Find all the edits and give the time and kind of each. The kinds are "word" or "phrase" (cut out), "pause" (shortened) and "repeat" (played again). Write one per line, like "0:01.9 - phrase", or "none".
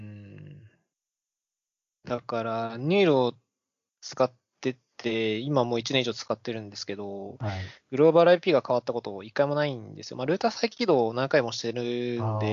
none